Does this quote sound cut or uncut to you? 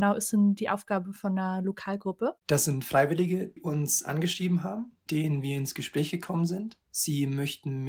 cut